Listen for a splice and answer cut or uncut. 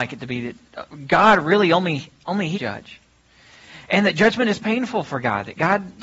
cut